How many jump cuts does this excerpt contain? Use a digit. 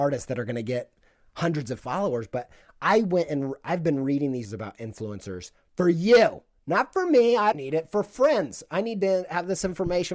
3